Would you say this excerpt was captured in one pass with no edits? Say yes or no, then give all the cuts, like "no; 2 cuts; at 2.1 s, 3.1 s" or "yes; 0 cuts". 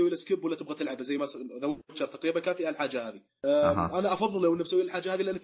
yes; 0 cuts